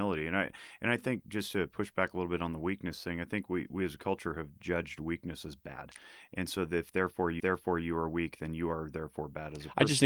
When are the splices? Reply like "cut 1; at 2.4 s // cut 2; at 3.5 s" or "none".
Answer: cut 1; at 7.4 s